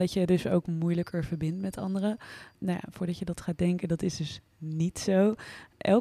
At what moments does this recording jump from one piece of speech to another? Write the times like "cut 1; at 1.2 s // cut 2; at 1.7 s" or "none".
none